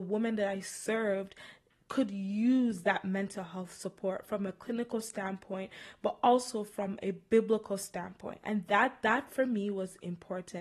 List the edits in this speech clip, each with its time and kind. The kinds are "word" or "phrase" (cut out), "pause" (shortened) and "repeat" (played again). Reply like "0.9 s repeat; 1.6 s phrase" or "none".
none